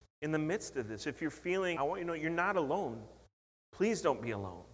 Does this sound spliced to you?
yes; 1 cut; at 1.8 s

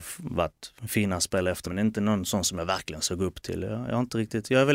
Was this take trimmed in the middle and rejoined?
yes; 1 cut; at 1.6 s

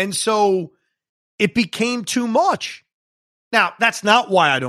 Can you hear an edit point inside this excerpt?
no; 0 cuts

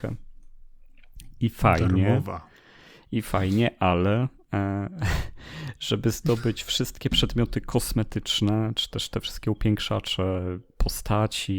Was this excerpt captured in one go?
yes; 0 cuts

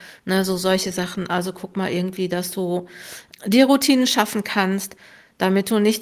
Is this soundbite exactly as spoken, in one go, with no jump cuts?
no; 1 cut; at 3.3 s

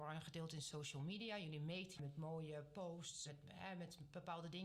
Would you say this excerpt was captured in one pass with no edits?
no; 2 cuts; at 1.9 s, 3.3 s

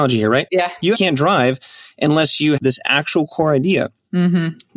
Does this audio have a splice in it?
yes; 2 cuts; at 0.9 s, 2.6 s

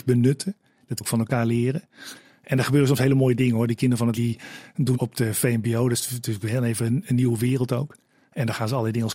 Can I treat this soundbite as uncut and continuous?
no; 3 cuts; at 1.0 s, 4.2 s, 4.9 s

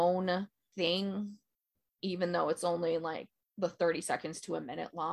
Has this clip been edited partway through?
no; 0 cuts

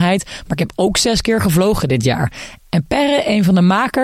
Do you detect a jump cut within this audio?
no; 0 cuts

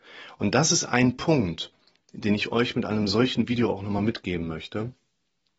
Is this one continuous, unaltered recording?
yes; 0 cuts

